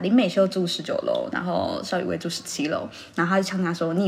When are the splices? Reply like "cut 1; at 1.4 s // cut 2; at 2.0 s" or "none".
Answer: none